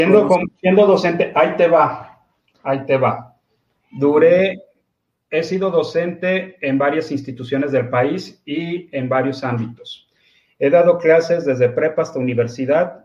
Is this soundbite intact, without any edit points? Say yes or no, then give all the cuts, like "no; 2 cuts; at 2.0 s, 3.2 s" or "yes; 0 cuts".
yes; 0 cuts